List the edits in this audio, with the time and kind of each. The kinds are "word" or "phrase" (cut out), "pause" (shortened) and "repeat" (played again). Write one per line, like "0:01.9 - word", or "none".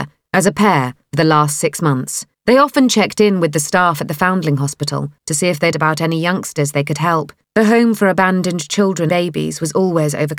0:02.3 - pause
0:05.2 - pause
0:05.7 - word
0:07.4 - pause
0:09.1 - word